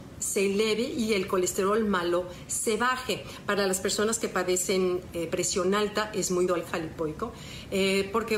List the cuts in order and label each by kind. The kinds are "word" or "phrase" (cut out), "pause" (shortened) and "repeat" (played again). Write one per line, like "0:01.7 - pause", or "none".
0:06.5 - phrase